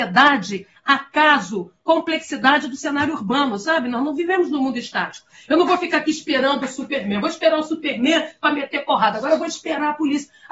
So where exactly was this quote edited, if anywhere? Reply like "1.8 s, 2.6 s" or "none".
none